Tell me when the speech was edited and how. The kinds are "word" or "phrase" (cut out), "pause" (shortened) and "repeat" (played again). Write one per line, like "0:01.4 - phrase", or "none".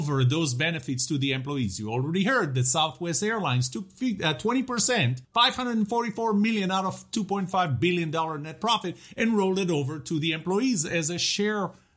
0:05.2 - pause